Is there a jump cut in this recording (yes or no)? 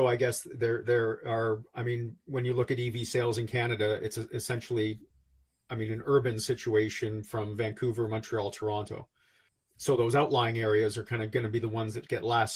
no